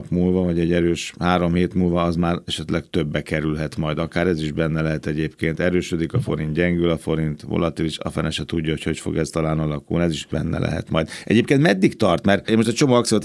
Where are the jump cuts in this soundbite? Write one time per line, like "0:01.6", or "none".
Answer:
none